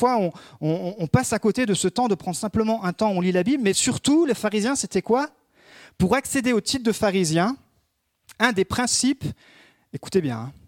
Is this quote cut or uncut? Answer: uncut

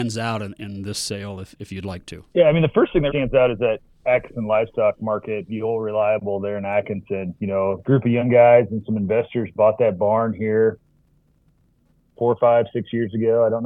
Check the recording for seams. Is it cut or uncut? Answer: cut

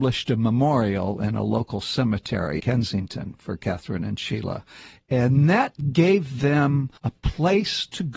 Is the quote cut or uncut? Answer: cut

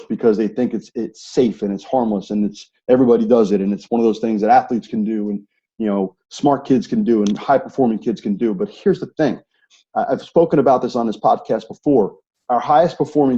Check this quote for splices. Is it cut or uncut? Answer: uncut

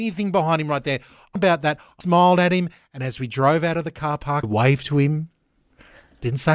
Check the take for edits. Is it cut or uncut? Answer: cut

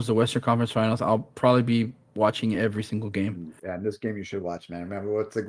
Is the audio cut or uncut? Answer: uncut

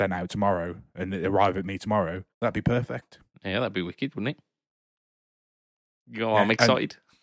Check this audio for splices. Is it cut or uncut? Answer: cut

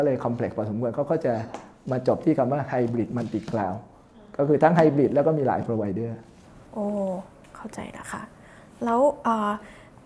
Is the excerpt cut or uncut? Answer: uncut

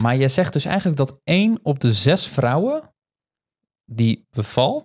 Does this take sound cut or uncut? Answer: uncut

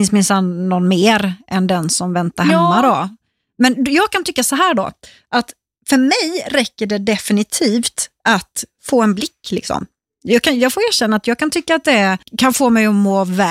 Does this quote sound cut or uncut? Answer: uncut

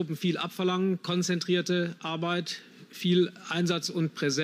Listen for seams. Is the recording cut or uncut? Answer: uncut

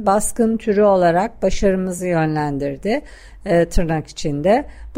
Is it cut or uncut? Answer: uncut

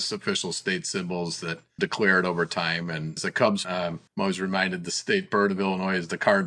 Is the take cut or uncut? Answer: cut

